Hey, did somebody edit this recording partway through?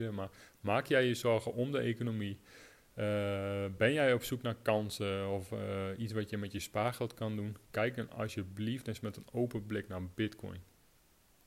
no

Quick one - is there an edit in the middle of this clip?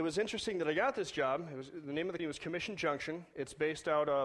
yes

